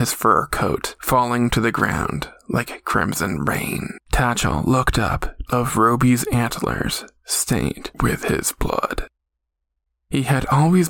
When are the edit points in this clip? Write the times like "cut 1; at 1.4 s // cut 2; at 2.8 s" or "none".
cut 1; at 4.0 s // cut 2; at 5.5 s